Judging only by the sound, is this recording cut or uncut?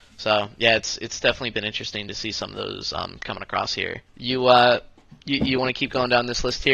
cut